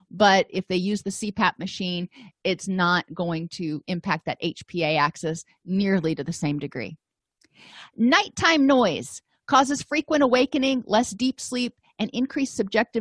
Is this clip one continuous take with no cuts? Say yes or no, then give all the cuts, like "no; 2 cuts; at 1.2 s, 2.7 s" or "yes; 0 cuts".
yes; 0 cuts